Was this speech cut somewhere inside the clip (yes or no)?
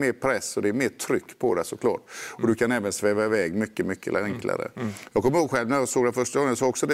no